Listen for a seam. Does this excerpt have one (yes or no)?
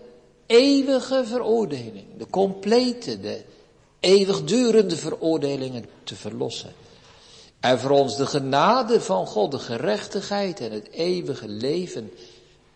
no